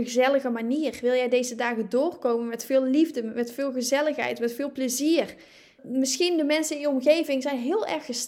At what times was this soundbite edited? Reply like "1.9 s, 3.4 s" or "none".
none